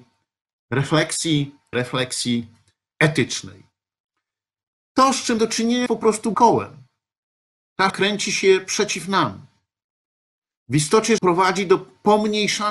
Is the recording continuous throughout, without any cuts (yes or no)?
no